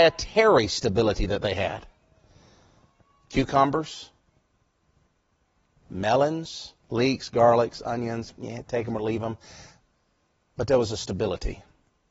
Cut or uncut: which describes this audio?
cut